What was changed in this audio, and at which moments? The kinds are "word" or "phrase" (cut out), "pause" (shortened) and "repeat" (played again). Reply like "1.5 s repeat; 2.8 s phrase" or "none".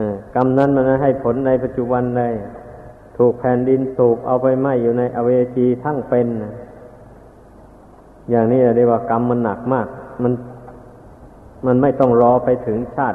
none